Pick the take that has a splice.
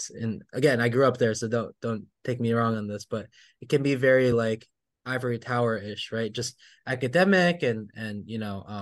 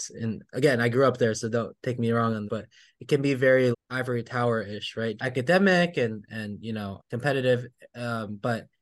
second; 5 cuts; at 1.8 s, 2.5 s, 3.7 s, 5.2 s, 7.0 s

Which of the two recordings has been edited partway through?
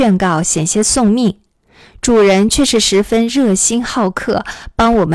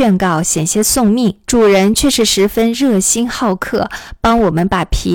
second; 1 cut; at 1.4 s

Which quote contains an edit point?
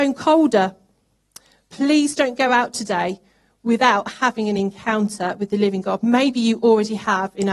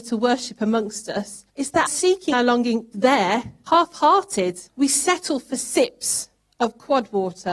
second; 7 cuts; at 1.5 s, 1.9 s, 2.3 s, 2.9 s, 3.7 s, 4.7 s, 6.4 s

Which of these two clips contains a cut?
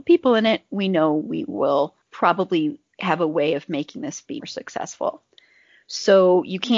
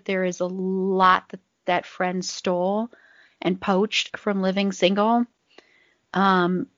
first; 2 cuts; at 2.0 s, 4.4 s

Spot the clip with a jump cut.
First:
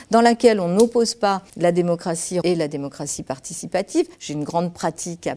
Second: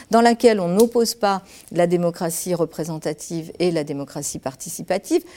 first; 3 cuts; at 1.5 s, 2.4 s, 4.1 s

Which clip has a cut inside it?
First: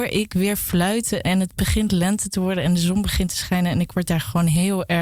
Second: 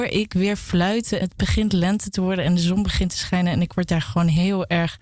second; 1 cut; at 1.2 s

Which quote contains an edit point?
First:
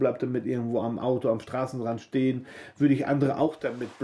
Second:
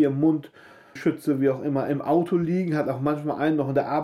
second; 1 cut; at 1.0 s

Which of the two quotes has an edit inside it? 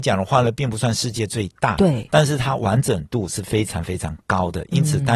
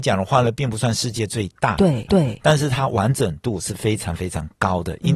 second; 1 cut; at 2.1 s

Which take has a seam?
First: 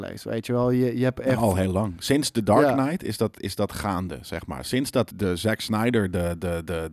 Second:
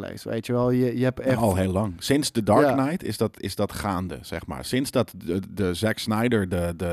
first; 1 cut; at 5.1 s

